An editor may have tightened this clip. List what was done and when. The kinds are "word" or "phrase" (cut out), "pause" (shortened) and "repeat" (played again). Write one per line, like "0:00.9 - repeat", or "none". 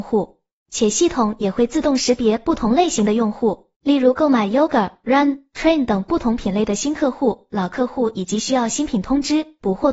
0:03.7 - pause